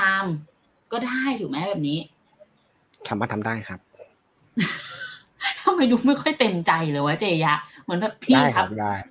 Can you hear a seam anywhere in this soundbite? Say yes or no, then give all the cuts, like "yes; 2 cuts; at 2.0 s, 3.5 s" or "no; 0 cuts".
no; 0 cuts